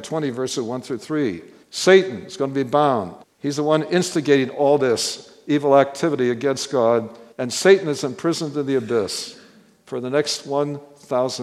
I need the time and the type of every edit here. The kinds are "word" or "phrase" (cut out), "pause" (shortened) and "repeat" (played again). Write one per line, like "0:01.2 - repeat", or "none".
0:01.6 - pause
0:03.2 - pause
0:07.3 - pause

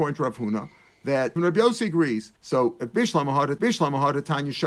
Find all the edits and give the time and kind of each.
0:01.4 - word
0:02.4 - pause
0:03.6 - repeat

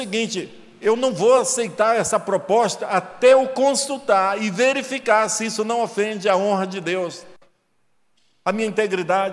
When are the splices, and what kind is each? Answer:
none

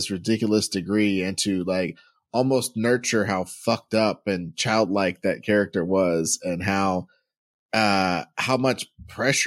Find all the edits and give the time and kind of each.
none

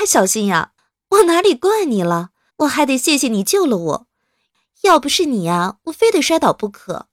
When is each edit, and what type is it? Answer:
0:02.5 - pause

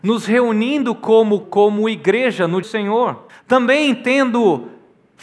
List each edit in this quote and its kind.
0:01.4 - word
0:02.6 - phrase
0:03.3 - pause

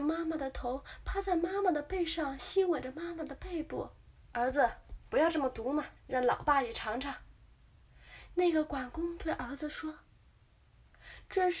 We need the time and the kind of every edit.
0:04.2 - pause
0:06.0 - pause

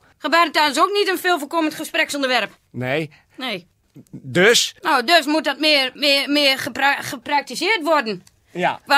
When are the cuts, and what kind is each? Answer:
0:02.7 - pause
0:03.8 - pause
0:04.8 - pause

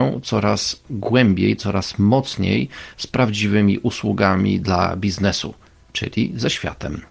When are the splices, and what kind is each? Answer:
none

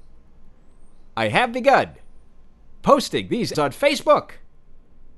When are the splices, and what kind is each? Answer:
0:03.5 - word

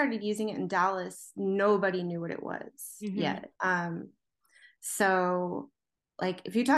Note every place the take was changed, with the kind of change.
0:03.6 - pause

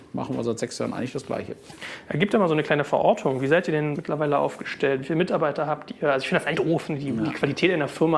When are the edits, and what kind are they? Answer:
0:03.9 - phrase
0:06.5 - phrase

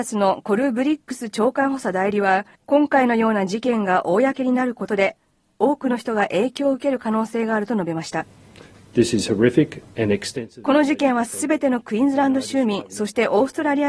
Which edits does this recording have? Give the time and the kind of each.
0:02.5 - pause

